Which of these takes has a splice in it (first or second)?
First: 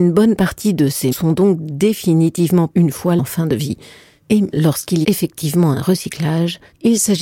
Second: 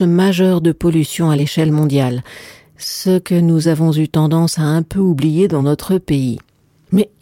first